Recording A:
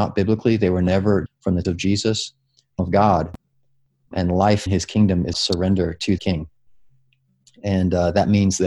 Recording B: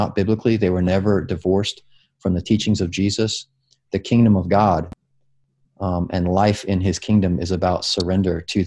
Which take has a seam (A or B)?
A